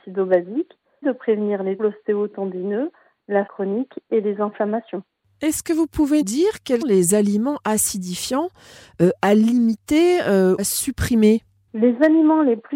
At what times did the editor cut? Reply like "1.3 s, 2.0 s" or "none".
1.0 s, 1.8 s, 3.5 s, 6.2 s, 6.8 s, 10.6 s

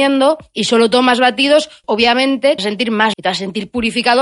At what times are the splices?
1.8 s, 2.6 s, 3.1 s

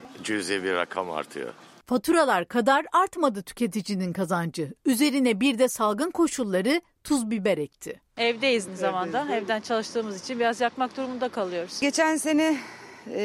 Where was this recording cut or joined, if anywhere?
8.7 s

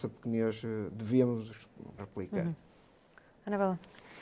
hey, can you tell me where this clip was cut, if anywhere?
2.0 s

